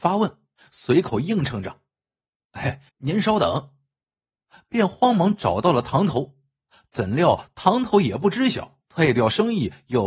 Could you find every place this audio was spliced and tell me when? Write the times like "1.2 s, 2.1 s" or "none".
2.9 s, 8.9 s